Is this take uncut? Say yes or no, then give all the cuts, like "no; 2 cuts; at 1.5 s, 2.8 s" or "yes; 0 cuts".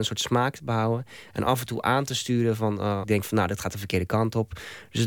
no; 1 cut; at 3.0 s